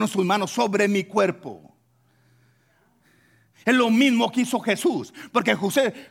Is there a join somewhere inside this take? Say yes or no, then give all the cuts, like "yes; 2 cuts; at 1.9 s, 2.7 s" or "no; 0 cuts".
no; 0 cuts